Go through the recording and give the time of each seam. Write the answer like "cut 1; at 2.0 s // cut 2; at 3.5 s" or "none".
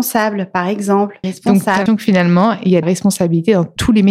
cut 1; at 1.2 s // cut 2; at 1.9 s // cut 3; at 2.8 s